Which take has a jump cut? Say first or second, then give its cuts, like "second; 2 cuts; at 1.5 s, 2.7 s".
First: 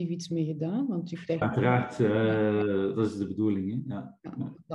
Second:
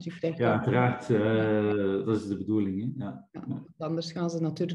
first; 1 cut; at 1.4 s